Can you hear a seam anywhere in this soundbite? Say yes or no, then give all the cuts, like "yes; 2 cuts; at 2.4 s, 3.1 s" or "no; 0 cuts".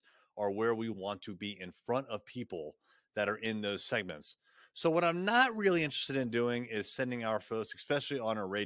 no; 0 cuts